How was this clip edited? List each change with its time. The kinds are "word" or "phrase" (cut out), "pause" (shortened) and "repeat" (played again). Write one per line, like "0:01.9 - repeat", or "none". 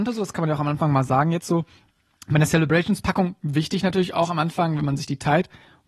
none